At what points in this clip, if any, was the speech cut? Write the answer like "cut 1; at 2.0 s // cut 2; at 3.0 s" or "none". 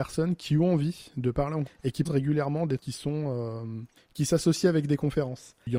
cut 1; at 1.7 s // cut 2; at 2.0 s // cut 3; at 2.8 s // cut 4; at 4.0 s